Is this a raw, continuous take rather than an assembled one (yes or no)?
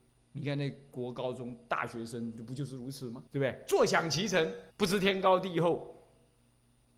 no